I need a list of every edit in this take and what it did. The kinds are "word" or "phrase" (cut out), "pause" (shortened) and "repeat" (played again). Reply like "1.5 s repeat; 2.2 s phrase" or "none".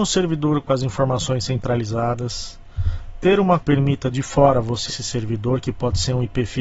3.6 s phrase; 4.9 s word